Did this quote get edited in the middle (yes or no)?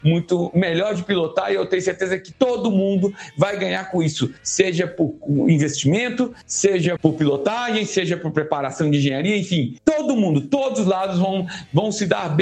yes